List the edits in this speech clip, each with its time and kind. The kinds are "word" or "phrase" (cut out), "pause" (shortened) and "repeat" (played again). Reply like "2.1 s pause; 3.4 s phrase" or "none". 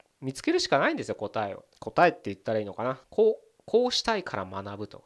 1.7 s pause; 3.0 s pause